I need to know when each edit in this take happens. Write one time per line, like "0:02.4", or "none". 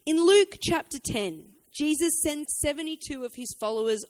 0:02.5